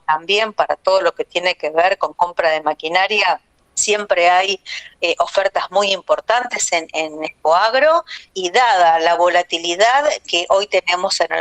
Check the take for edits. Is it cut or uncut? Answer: cut